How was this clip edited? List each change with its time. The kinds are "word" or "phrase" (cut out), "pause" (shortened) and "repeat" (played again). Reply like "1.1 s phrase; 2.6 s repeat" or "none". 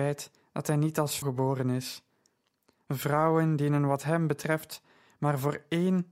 1.2 s word